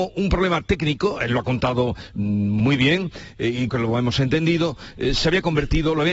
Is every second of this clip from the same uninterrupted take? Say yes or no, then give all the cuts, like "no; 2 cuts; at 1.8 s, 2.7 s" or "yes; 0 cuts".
no; 1 cut; at 3.7 s